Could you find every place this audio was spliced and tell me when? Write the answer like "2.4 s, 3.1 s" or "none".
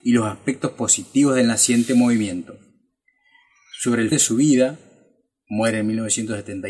4.1 s